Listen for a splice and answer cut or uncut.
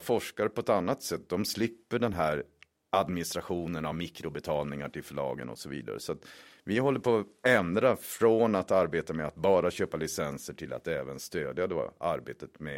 uncut